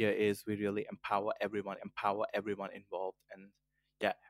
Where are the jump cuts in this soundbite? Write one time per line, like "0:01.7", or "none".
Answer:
0:01.8